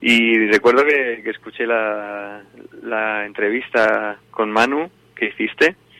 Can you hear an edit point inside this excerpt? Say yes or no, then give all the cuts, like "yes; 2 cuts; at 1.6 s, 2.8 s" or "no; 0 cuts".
yes; 1 cut; at 4.2 s